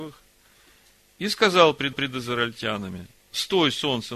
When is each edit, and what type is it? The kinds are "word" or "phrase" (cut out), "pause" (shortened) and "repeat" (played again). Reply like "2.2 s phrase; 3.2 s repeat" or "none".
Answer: 1.9 s repeat